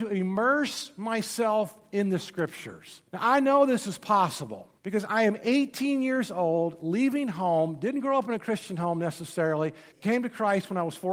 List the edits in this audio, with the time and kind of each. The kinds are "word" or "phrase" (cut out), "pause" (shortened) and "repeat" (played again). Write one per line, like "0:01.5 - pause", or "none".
0:03.1 - pause
0:04.8 - pause
0:09.9 - pause